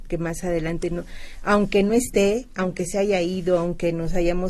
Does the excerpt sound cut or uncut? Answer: uncut